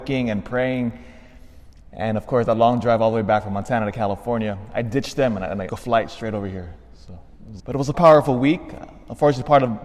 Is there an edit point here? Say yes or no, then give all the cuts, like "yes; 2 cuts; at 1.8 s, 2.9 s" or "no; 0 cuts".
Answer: yes; 3 cuts; at 5.7 s, 7.6 s, 7.9 s